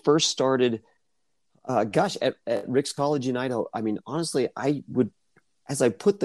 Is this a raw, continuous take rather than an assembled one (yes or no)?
yes